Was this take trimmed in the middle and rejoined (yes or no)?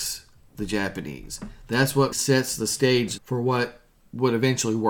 yes